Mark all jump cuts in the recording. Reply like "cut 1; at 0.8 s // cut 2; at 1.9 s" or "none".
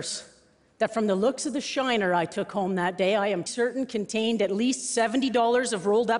cut 1; at 3.5 s